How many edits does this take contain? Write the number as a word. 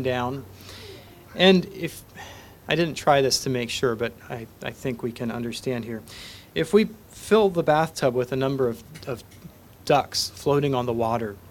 zero